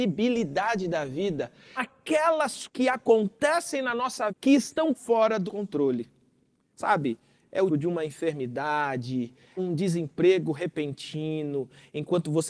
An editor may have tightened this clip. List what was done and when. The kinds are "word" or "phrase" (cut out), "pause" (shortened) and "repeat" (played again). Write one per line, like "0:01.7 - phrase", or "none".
0:01.8 - word
0:02.7 - word
0:04.3 - word
0:04.9 - word
0:05.5 - word
0:07.7 - word
0:09.6 - word